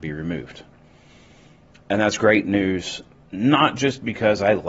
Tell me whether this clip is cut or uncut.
uncut